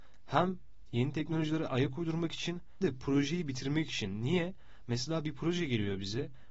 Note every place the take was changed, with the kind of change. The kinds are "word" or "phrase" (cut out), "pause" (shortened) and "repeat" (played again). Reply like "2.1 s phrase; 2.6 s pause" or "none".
2.8 s word